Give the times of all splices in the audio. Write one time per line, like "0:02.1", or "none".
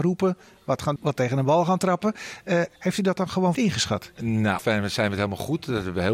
0:01.0
0:03.5
0:04.6

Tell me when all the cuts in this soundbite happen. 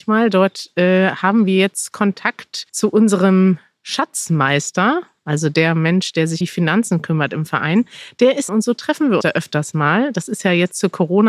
0:02.7
0:06.4
0:08.5
0:09.2

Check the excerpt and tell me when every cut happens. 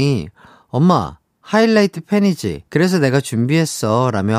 0:02.7

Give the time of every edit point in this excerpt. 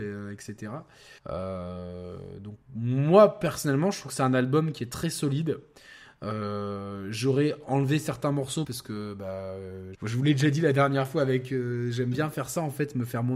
0:01.2
0:08.6
0:09.9

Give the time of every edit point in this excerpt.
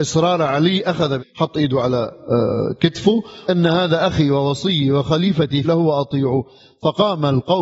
0:01.2
0:03.5
0:05.6

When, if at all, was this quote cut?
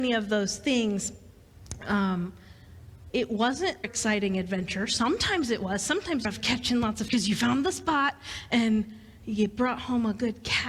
0:03.1
0:03.8
0:06.2
0:07.1

